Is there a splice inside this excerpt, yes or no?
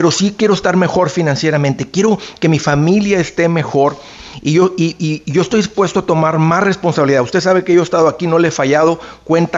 no